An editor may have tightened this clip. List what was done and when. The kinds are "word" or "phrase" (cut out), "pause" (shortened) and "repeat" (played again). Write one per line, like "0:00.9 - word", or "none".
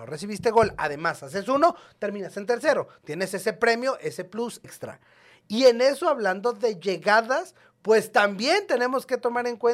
0:04.6 - word